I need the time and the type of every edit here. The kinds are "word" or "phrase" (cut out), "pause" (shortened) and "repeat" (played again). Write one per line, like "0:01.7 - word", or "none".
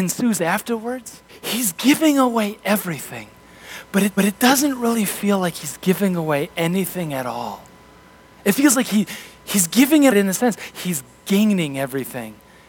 0:01.3 - pause
0:04.2 - repeat
0:10.1 - phrase